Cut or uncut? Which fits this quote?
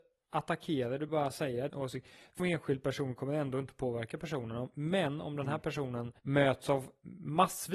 cut